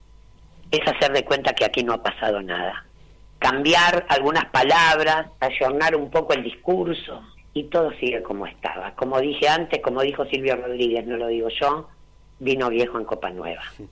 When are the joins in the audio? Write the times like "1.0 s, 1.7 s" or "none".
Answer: 3.3 s, 7.4 s